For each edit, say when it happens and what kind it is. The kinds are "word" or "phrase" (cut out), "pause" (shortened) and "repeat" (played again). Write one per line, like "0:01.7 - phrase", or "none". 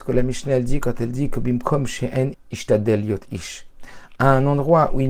0:02.3 - word